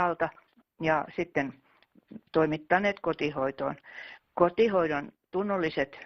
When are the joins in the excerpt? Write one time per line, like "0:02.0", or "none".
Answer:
0:02.3